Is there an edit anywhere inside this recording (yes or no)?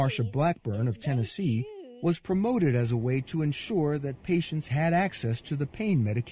no